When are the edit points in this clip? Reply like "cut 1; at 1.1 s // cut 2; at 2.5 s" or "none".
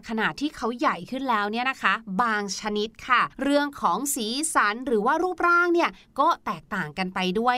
cut 1; at 3.3 s